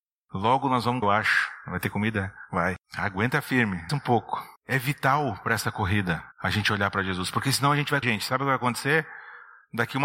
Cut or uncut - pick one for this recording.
cut